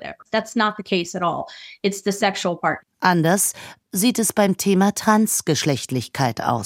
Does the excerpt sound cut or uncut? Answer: uncut